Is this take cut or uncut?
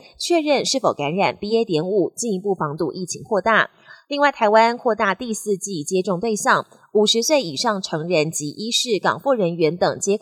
uncut